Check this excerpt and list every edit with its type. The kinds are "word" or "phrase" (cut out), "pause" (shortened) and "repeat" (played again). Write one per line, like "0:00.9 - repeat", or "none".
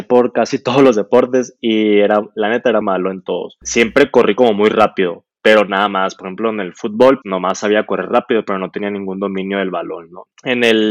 0:02.8 - word
0:07.2 - word